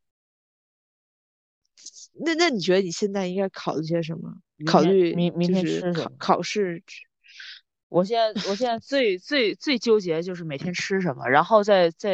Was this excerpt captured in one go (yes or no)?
no